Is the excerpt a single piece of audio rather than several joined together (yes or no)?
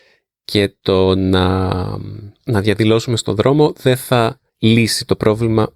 no